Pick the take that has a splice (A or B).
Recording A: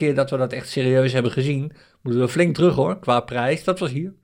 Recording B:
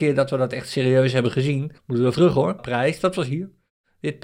B